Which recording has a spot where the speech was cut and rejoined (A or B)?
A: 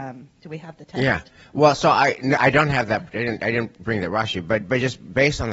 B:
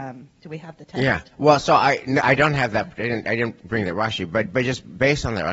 B